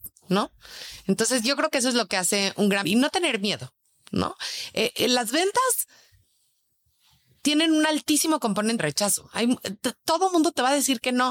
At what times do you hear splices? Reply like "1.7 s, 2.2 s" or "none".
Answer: 2.8 s, 8.8 s